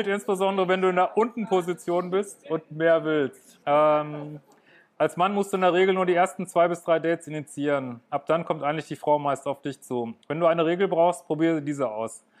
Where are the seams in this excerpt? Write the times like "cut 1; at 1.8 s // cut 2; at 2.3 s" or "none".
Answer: cut 1; at 3.6 s // cut 2; at 10.2 s